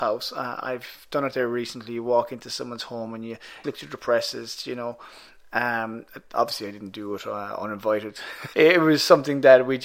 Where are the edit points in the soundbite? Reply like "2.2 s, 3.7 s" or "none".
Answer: 3.6 s, 8.5 s